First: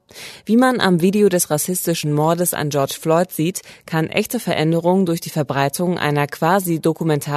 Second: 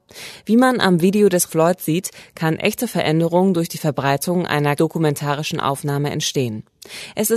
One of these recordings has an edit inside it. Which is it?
second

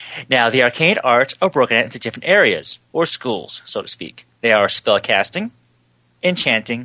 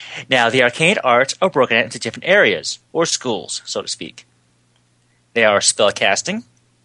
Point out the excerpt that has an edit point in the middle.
first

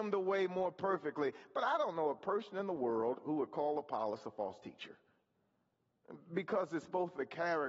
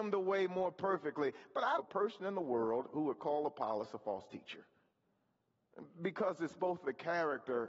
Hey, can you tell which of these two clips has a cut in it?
second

